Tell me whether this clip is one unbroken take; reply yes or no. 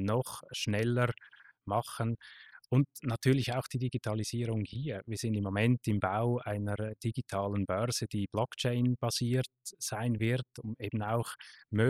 yes